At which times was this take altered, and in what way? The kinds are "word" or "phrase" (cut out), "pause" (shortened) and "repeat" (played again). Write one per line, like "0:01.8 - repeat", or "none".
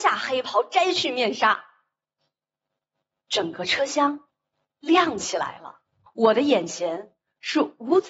0:06.1 - pause